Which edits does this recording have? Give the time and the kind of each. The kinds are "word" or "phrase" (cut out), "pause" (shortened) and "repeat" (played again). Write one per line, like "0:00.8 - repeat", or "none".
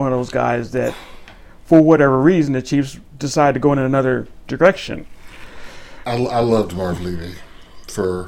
none